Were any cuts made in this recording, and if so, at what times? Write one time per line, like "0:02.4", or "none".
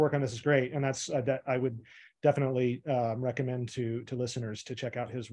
none